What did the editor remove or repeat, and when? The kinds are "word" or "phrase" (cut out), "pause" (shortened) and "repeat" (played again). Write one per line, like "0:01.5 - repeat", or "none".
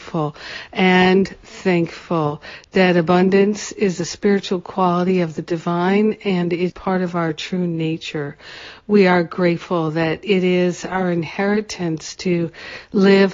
0:06.7 - word